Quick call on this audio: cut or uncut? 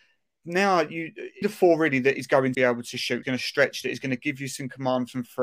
cut